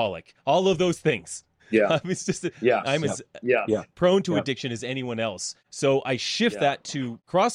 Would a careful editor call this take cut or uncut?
uncut